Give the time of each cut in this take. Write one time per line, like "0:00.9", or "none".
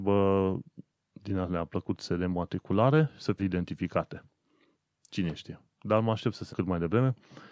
0:03.4
0:04.7
0:05.7
0:06.5